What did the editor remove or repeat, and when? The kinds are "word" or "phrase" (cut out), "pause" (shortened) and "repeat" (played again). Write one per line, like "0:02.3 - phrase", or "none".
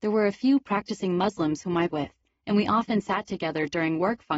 0:01.9 - word